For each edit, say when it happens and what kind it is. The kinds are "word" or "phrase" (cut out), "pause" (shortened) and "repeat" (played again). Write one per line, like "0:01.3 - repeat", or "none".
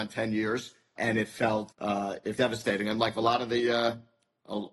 0:01.0 - word
0:01.7 - word
0:02.3 - word